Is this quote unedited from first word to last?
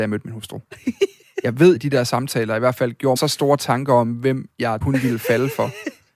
no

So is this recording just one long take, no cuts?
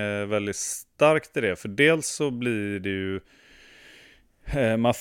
yes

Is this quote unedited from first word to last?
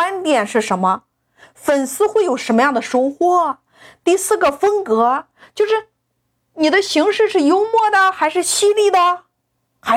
yes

